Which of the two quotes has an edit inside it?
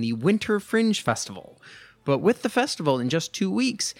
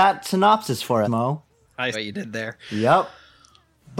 second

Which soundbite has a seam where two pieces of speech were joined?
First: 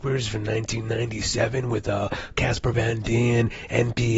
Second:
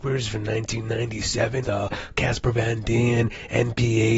second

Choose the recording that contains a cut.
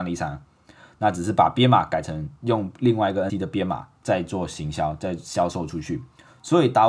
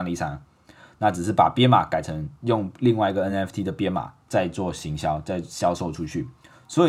first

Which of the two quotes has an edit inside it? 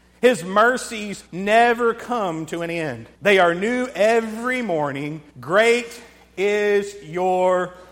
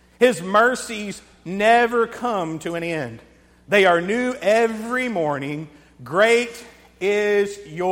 first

